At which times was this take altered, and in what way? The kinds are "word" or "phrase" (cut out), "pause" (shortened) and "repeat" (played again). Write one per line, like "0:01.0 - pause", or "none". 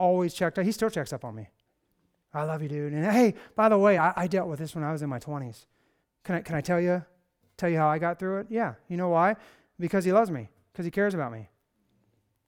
none